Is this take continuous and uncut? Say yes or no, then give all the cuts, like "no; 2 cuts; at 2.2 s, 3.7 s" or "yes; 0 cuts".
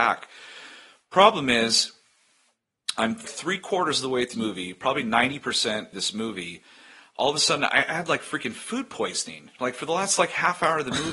no; 3 cuts; at 3.2 s, 4.3 s, 5.9 s